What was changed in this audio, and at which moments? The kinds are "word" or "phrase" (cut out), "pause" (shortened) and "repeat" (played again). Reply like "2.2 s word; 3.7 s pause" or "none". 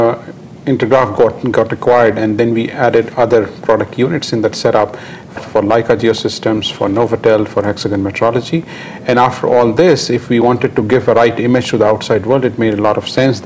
5.4 s word